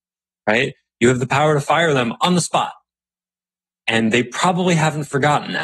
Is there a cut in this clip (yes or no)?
no